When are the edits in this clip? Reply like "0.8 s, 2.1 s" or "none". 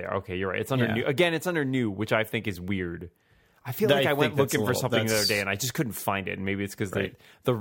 none